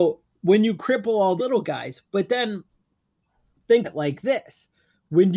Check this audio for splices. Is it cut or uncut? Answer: cut